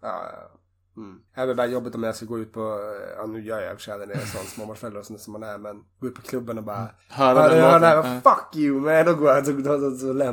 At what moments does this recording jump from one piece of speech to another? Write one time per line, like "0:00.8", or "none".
0:01.3
0:07.0